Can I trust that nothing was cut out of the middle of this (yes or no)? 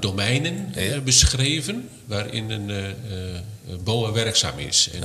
yes